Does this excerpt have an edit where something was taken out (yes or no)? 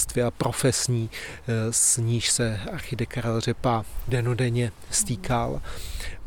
no